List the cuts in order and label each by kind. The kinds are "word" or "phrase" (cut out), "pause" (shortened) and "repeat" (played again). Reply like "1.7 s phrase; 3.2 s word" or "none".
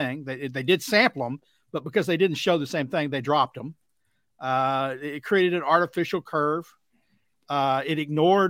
none